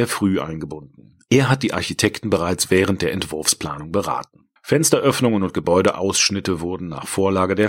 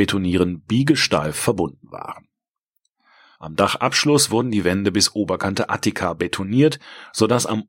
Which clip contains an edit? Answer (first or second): first